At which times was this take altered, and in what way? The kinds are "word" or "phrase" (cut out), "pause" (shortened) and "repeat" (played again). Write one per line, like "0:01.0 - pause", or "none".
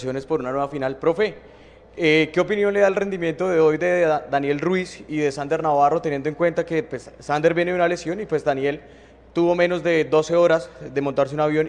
none